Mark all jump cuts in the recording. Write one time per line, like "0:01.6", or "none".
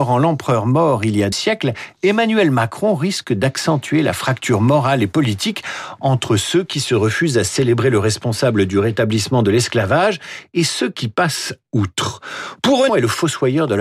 0:01.3
0:12.9